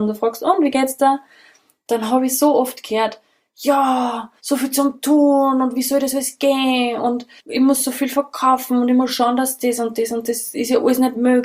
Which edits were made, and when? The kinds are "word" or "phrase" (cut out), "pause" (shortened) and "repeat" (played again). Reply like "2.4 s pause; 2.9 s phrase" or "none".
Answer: 4.4 s pause